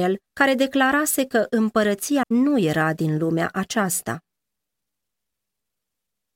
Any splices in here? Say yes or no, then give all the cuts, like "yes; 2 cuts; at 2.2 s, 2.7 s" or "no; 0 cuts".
yes; 1 cut; at 2.2 s